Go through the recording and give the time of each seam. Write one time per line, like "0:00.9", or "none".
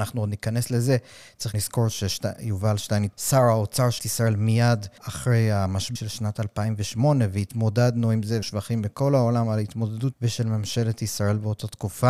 0:01.5
0:03.1
0:04.0
0:05.0
0:06.0
0:08.4
0:10.1